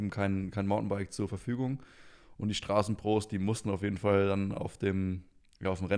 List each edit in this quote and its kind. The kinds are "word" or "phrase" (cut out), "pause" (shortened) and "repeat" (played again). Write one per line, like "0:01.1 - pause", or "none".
none